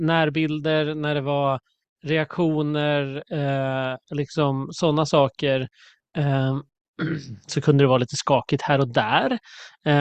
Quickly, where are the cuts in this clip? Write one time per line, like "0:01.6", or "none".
none